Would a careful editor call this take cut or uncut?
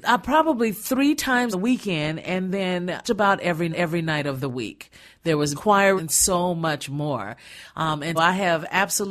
cut